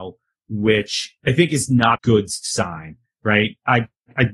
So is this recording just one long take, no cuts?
no; 2 cuts; at 1.2 s, 2.0 s

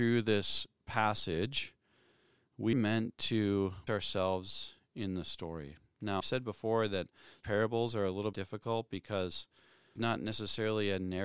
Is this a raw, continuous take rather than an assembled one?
no; 6 cuts; at 2.7 s, 3.9 s, 6.2 s, 7.4 s, 8.3 s, 10.0 s

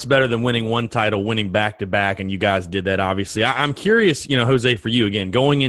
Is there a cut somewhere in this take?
no; 0 cuts

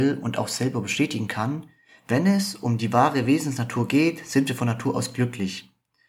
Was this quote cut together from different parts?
no; 0 cuts

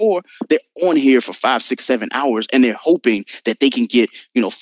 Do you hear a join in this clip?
no; 0 cuts

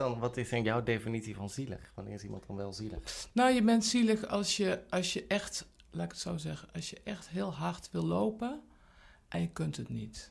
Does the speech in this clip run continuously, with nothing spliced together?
yes; 0 cuts

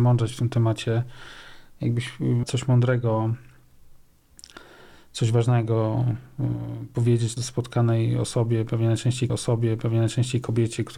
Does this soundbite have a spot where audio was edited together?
yes; 3 cuts; at 2.4 s, 7.4 s, 9.3 s

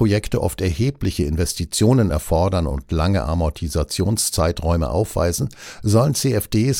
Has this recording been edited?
no; 0 cuts

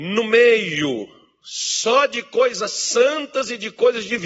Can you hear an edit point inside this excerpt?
no; 0 cuts

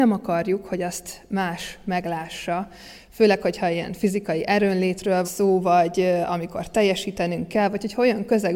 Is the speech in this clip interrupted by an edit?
yes; 1 cut; at 5.2 s

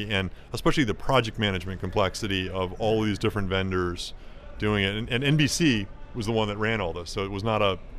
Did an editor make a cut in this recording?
no; 0 cuts

